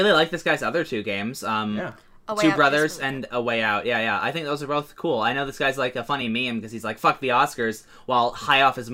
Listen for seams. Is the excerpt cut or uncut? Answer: uncut